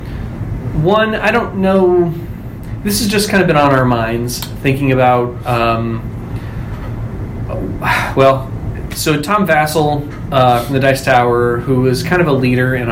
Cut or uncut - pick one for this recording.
uncut